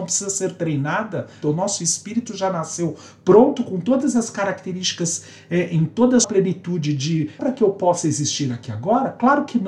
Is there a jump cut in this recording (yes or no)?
yes